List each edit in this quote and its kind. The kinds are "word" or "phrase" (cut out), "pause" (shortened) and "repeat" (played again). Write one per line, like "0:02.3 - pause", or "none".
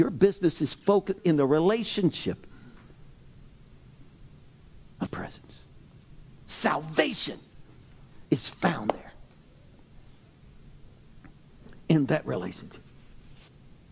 0:01.2 - word
0:05.1 - word
0:08.2 - pause